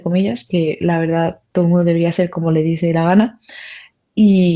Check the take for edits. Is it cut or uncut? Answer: uncut